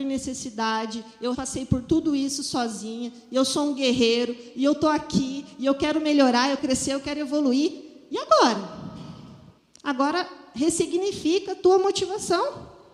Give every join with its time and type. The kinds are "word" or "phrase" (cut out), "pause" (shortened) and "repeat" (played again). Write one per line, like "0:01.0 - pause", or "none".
0:01.3 - word
0:06.6 - word
0:09.6 - pause